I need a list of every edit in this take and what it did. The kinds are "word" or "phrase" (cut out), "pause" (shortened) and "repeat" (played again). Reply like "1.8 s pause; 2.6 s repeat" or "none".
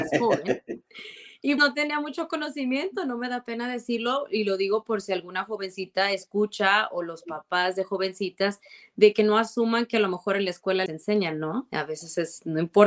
1.6 s word; 10.9 s word